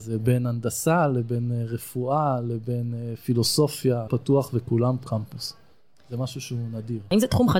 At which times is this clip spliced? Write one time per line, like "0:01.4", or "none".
0:04.1
0:05.0